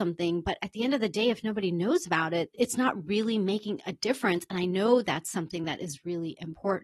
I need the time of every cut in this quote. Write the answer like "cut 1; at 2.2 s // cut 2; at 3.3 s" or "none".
none